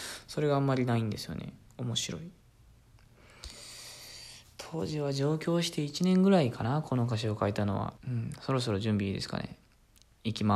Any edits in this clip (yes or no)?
yes